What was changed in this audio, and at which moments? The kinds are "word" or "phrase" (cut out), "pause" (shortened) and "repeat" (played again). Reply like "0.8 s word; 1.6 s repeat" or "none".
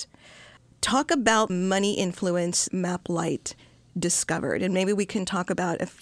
1.5 s word; 2.7 s word